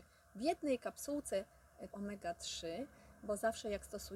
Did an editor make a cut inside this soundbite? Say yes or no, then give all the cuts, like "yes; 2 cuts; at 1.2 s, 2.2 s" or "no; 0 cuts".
yes; 1 cut; at 1.9 s